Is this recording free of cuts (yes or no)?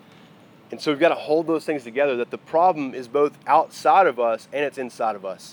yes